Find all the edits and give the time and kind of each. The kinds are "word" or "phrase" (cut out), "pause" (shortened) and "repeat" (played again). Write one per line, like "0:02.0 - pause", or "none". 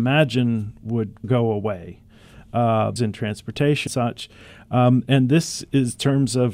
0:01.2 - word
0:03.0 - phrase
0:03.9 - word